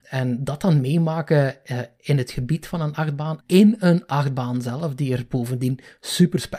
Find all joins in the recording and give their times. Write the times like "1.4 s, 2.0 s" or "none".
3.4 s